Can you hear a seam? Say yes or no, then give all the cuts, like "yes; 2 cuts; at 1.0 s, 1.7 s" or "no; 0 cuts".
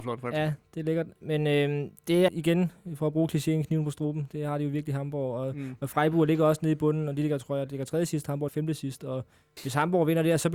yes; 2 cuts; at 2.3 s, 8.5 s